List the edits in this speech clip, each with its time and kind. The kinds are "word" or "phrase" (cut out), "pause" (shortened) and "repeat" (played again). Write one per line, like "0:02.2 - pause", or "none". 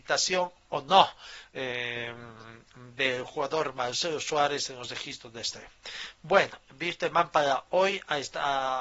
none